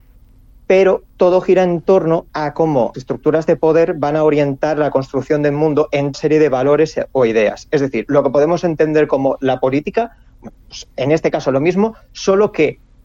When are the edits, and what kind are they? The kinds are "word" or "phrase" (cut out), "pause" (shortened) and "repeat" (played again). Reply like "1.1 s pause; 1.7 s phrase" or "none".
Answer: 1.1 s pause; 2.9 s word; 6.1 s phrase